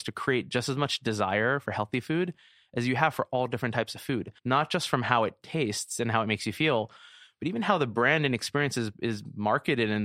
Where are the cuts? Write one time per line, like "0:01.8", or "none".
0:04.4